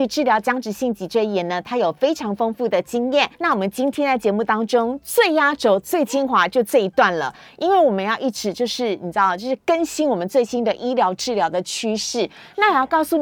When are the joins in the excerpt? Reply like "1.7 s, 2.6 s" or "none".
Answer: 3.3 s